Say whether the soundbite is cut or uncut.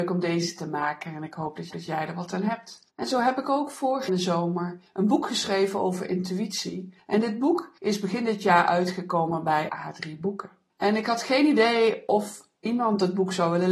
cut